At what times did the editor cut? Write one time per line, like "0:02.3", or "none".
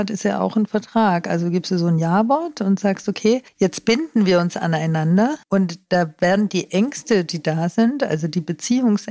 0:03.5
0:05.4